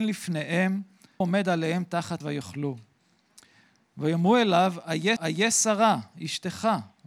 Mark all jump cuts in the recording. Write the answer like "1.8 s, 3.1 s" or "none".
1.2 s, 2.2 s, 5.2 s